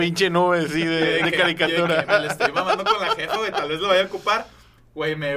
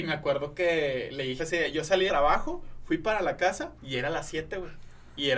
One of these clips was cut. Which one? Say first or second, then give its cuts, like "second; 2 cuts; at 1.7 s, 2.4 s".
second; 3 cuts; at 1.4 s, 2.1 s, 3.8 s